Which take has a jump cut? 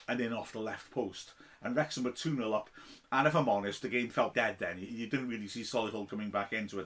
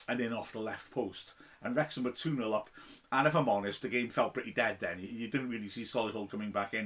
first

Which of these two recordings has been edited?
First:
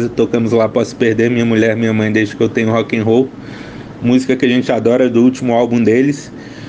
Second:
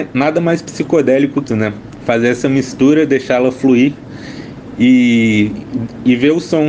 second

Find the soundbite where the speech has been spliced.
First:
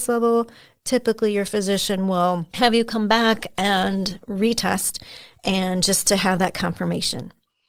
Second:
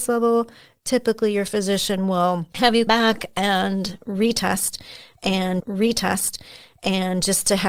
second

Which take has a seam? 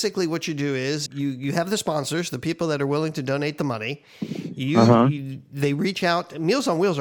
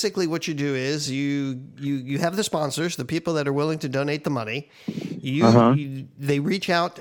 first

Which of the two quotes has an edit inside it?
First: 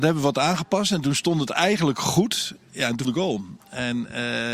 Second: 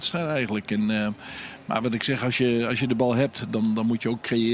first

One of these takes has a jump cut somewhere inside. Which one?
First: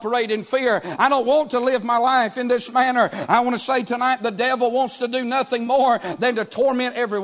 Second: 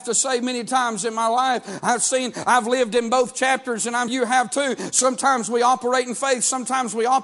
second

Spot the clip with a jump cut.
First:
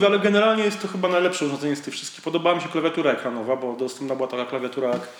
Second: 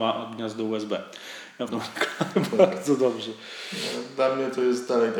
second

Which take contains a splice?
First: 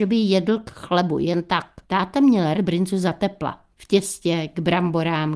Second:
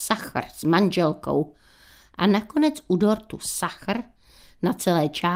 first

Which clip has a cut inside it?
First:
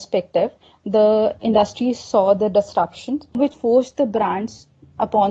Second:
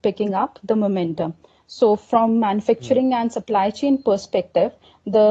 first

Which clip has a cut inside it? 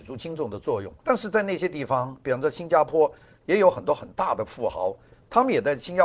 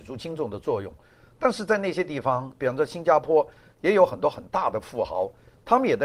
first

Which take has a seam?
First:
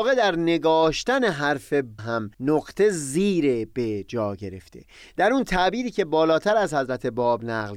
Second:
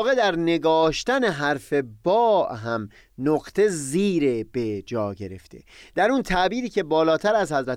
first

